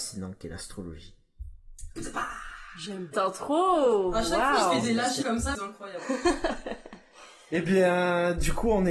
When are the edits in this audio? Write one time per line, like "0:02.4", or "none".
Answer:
0:03.1
0:05.2
0:05.5